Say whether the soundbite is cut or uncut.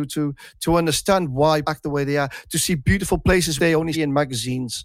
cut